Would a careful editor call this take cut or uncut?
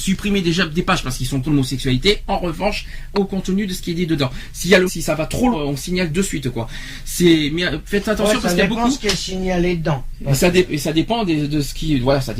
cut